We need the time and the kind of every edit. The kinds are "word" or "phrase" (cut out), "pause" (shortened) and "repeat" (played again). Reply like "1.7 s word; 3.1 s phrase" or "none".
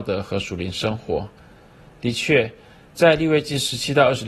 none